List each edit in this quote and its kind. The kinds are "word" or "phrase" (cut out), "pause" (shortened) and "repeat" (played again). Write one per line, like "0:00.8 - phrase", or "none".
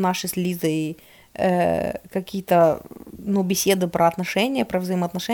none